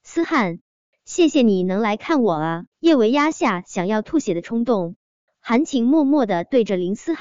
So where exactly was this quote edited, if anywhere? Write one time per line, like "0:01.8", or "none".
0:02.7